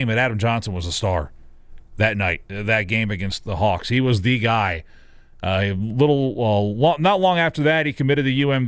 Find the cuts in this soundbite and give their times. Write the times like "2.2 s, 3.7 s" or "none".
none

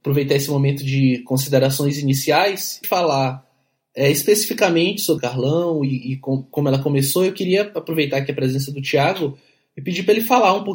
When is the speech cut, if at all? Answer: 2.8 s, 5.2 s

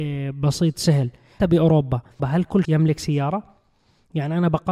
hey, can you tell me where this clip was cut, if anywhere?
1.4 s, 2.2 s, 2.6 s

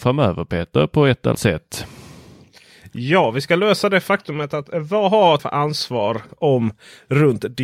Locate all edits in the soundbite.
1.3 s, 5.4 s

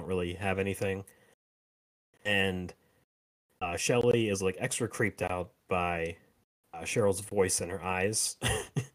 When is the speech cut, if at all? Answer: none

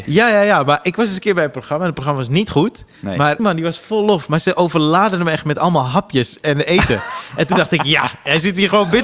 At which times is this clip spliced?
3.4 s

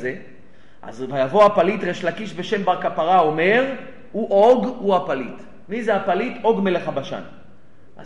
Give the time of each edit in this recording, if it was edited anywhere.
none

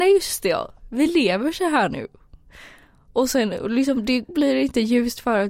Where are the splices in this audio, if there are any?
none

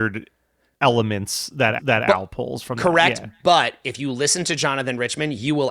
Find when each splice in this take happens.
1.8 s

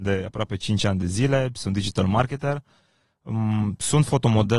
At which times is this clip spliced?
none

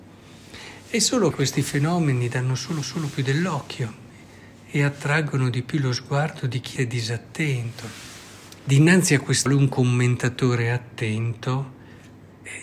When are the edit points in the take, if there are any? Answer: 1.3 s, 2.8 s, 6.8 s, 8.6 s, 9.5 s

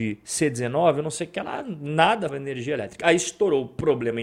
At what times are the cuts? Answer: 2.3 s

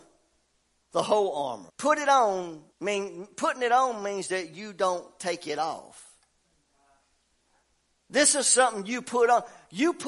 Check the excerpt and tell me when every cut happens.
1.7 s, 2.7 s

